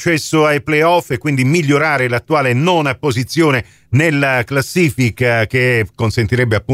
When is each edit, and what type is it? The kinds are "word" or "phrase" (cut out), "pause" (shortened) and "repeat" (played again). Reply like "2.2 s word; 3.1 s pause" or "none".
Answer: none